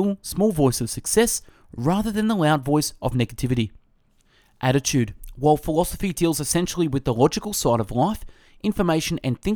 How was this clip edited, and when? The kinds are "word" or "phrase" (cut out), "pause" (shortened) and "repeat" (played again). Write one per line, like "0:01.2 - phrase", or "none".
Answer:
none